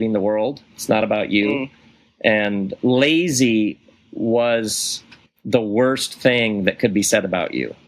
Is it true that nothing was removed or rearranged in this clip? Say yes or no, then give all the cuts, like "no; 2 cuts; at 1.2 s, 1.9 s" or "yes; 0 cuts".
yes; 0 cuts